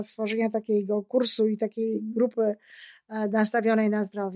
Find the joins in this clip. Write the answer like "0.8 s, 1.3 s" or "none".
none